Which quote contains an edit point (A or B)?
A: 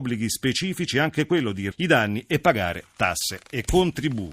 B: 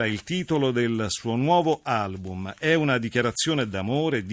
A